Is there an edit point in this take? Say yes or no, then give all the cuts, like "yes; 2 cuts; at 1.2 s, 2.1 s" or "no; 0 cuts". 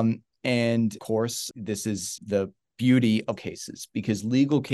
yes; 4 cuts; at 1.0 s, 1.5 s, 2.2 s, 3.4 s